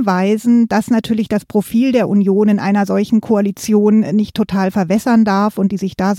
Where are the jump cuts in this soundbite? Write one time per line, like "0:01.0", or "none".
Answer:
none